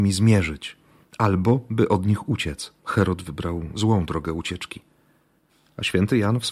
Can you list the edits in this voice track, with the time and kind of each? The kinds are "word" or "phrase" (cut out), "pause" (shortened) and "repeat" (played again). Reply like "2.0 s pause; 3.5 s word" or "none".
2.8 s pause